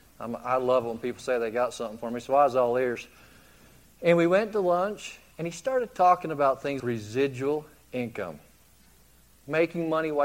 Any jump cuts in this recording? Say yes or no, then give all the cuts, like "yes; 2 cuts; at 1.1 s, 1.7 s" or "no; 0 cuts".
yes; 1 cut; at 6.8 s